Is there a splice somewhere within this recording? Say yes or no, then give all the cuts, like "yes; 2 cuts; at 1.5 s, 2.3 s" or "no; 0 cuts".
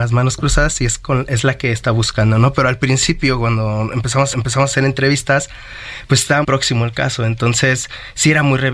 yes; 2 cuts; at 4.3 s, 6.4 s